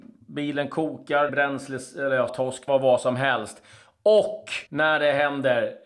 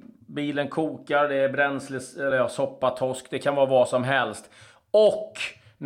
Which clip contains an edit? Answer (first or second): first